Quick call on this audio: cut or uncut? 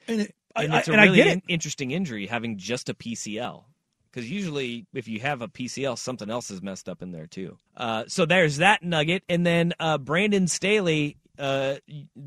cut